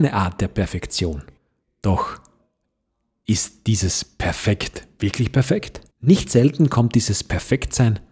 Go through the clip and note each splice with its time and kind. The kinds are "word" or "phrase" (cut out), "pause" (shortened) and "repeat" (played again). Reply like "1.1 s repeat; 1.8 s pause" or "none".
1.4 s pause; 5.9 s pause